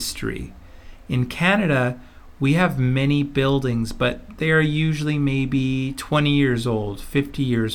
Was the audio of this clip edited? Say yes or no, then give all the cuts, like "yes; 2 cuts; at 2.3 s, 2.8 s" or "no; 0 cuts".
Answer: no; 0 cuts